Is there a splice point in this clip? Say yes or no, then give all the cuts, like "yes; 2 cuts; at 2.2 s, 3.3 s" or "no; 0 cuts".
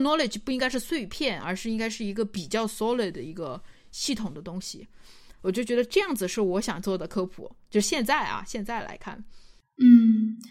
no; 0 cuts